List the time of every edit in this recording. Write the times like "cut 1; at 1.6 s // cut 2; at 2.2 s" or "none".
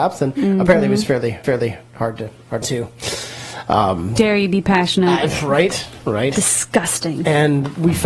cut 1; at 1.4 s // cut 2; at 2.6 s // cut 3; at 4.2 s